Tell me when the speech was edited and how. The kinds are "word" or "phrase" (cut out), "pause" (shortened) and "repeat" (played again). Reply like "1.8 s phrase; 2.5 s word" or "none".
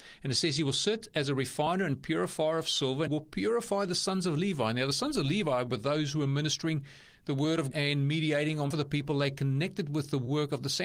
3.1 s word; 7.7 s word; 8.7 s word